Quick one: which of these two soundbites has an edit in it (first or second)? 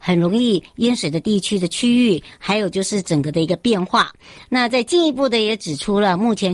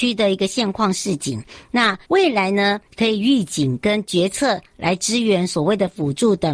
second